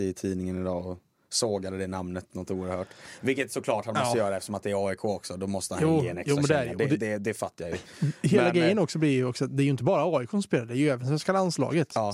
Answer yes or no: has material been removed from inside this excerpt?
no